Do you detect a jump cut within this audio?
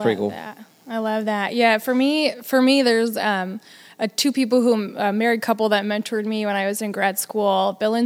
no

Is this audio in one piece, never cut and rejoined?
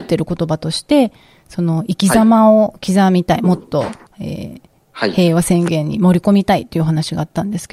yes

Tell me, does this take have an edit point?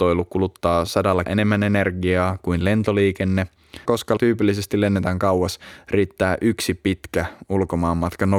yes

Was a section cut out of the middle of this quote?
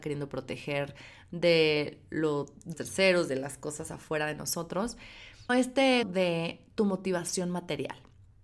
yes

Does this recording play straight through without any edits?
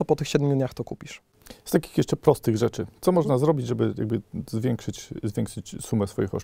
yes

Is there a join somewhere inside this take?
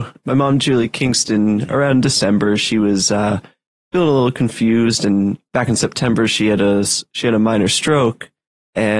no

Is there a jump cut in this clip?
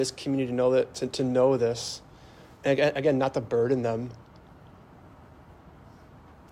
no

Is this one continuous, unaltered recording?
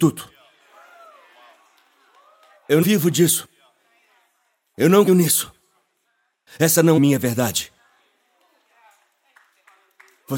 no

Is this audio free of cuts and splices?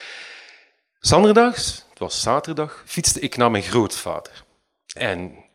yes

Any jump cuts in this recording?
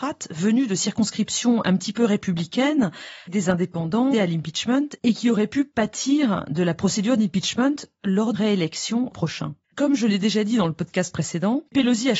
yes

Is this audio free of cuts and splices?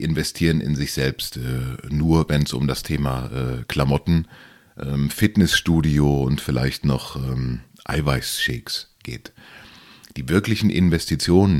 yes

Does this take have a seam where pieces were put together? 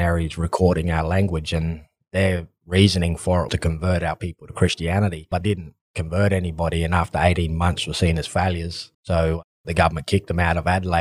yes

